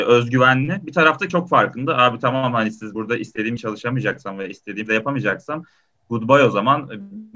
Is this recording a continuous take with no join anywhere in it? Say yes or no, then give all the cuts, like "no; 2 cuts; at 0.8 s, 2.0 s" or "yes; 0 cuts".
no; 4 cuts; at 1.3 s, 2.9 s, 3.6 s, 4.9 s